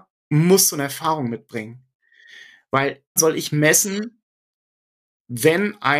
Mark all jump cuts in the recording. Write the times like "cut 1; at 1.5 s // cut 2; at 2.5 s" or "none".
cut 1; at 3.2 s